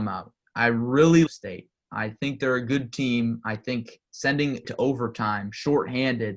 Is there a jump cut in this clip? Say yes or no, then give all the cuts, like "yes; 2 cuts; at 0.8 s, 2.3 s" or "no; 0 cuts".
yes; 2 cuts; at 1.3 s, 4.6 s